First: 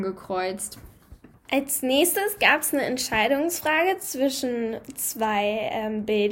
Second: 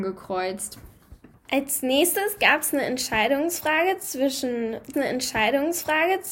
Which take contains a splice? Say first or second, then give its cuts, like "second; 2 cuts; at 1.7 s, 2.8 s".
second; 1 cut; at 4.9 s